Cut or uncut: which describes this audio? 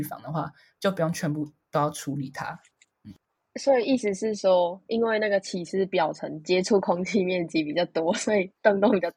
uncut